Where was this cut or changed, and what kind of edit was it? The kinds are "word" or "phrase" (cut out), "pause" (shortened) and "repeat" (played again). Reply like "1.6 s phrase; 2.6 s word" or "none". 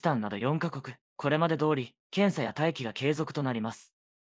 1.0 s pause; 2.0 s pause